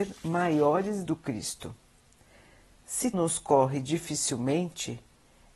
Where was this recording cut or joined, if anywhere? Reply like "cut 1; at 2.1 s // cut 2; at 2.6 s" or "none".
cut 1; at 1.0 s // cut 2; at 3.1 s